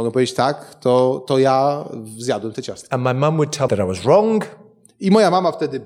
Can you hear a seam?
yes; 1 cut; at 3.7 s

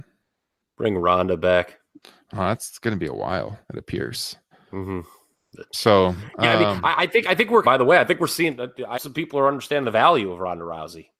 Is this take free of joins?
no; 4 cuts; at 3.6 s, 4.5 s, 7.6 s, 8.9 s

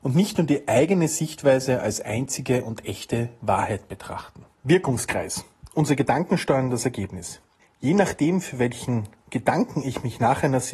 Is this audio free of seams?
no; 2 cuts; at 4.5 s, 7.6 s

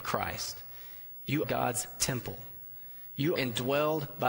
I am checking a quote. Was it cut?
yes; 2 cuts; at 1.4 s, 3.4 s

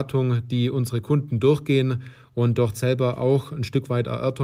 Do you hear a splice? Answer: no; 0 cuts

